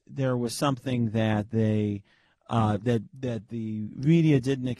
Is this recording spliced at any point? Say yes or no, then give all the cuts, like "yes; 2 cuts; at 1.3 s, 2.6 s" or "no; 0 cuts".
no; 0 cuts